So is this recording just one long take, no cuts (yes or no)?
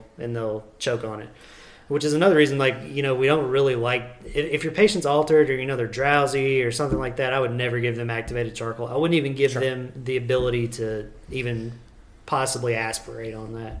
yes